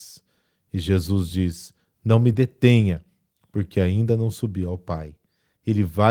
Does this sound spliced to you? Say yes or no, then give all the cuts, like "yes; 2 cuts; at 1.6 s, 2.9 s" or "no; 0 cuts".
no; 0 cuts